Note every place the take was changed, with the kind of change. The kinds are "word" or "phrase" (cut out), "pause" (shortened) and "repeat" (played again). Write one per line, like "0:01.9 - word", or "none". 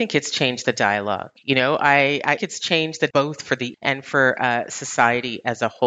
0:02.4 - phrase
0:03.1 - word
0:03.7 - word